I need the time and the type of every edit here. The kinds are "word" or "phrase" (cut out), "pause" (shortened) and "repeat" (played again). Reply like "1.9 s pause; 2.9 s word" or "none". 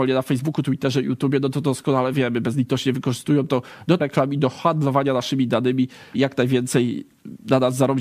4.0 s word; 6.1 s word